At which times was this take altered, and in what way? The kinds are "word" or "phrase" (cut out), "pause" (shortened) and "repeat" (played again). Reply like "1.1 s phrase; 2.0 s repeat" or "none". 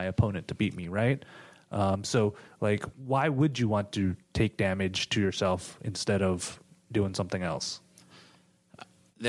none